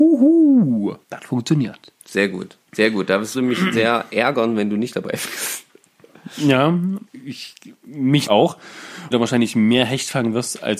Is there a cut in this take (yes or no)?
yes